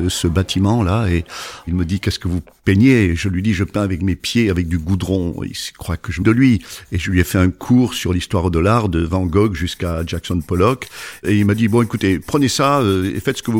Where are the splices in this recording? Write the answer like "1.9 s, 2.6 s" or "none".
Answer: 6.2 s